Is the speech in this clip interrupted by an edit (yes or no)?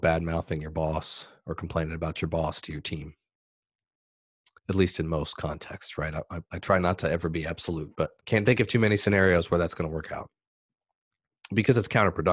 yes